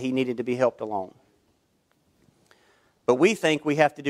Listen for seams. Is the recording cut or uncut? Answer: uncut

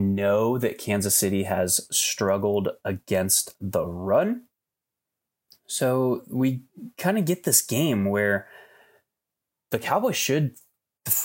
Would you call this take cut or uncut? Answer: uncut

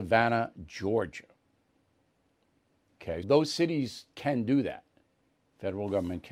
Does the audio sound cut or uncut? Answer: cut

